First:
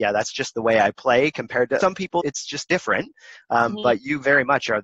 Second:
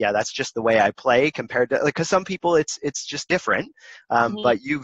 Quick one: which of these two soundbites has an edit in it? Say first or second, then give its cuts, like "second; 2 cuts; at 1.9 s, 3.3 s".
first; 2 cuts; at 1.8 s, 2.2 s